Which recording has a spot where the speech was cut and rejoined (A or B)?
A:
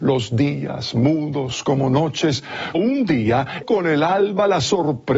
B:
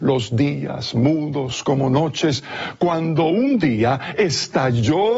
A